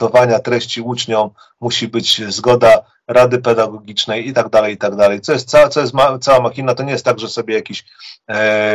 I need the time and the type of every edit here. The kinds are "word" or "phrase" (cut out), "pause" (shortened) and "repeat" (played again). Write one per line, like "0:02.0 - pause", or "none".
none